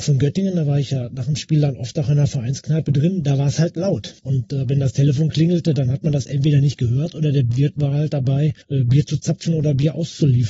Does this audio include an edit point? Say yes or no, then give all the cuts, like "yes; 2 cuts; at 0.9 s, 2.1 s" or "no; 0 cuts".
yes; 2 cuts; at 4.2 s, 8.6 s